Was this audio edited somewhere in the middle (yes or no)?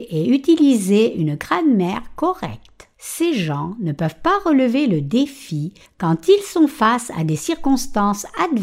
yes